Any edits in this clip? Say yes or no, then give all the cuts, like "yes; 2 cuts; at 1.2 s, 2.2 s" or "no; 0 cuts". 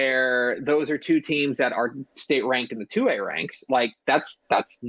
no; 0 cuts